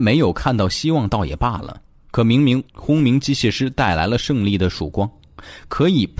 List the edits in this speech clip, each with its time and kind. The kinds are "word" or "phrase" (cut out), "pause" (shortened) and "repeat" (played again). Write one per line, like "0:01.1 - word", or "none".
0:02.7 - pause